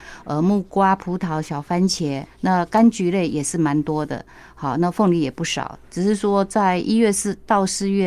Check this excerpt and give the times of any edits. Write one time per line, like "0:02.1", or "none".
none